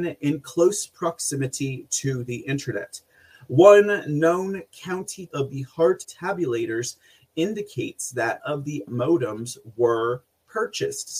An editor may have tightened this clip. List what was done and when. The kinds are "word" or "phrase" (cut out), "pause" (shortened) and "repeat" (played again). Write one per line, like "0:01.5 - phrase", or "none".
0:05.3 - word
0:06.0 - word
0:08.4 - word
0:08.9 - word